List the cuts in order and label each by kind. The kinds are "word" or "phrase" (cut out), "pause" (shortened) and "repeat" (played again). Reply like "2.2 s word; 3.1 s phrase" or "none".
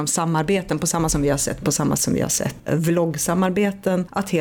1.1 s word; 1.6 s word; 2.0 s word; 2.7 s word